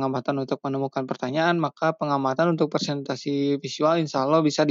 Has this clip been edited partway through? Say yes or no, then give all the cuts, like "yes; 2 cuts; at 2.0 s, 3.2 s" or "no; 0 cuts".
no; 0 cuts